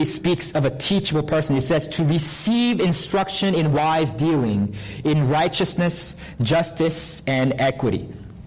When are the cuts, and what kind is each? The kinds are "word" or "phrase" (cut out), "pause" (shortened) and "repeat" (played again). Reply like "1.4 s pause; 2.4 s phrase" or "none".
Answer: none